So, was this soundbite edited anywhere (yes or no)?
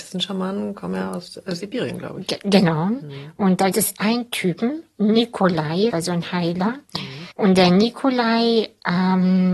yes